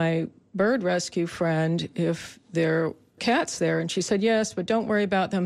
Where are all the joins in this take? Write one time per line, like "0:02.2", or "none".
0:03.2